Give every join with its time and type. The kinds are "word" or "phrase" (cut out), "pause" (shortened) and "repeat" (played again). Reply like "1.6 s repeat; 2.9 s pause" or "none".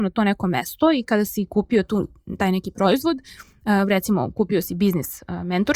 none